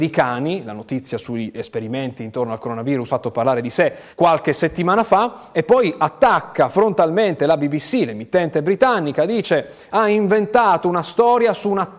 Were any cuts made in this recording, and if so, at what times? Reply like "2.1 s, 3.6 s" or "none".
3.1 s, 4.1 s

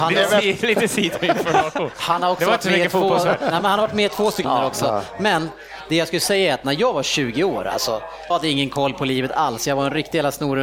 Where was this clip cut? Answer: 4.4 s, 8.3 s

